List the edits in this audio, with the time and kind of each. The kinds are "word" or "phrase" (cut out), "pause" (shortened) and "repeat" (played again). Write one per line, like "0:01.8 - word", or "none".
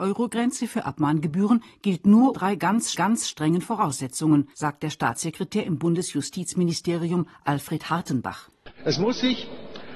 0:02.3 - word
0:02.9 - repeat
0:04.5 - pause